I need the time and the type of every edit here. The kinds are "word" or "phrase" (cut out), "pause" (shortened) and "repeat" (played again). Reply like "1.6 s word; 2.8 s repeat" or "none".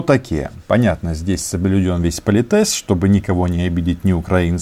none